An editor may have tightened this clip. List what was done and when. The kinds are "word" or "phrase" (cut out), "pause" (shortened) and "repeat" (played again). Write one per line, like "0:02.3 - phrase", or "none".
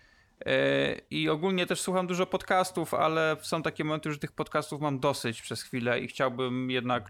0:01.1 - pause